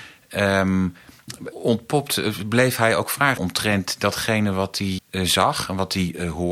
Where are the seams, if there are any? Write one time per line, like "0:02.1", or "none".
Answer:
0:01.5
0:03.4
0:05.0